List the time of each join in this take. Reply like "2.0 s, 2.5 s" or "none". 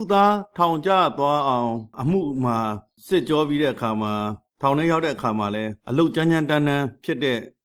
5.8 s